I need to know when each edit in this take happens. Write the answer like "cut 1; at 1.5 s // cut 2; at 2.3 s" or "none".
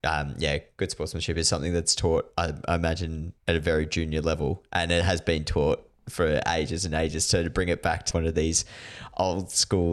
cut 1; at 3.4 s // cut 2; at 8.1 s